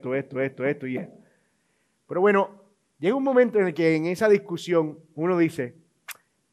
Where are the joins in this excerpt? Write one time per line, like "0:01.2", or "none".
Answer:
none